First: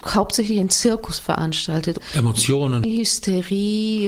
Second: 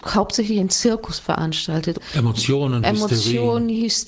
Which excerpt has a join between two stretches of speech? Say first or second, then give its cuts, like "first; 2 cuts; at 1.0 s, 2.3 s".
first; 1 cut; at 2.8 s